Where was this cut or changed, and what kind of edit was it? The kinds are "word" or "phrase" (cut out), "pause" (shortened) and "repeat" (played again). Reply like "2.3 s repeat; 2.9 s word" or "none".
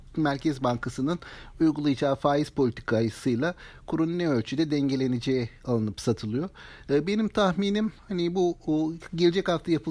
none